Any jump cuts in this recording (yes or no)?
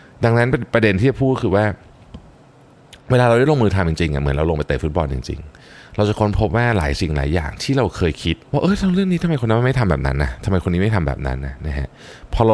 yes